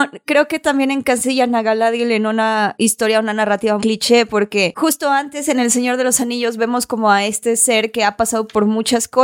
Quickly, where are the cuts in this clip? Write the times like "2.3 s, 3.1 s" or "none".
3.8 s